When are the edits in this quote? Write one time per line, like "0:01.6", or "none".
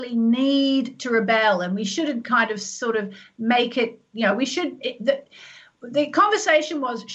none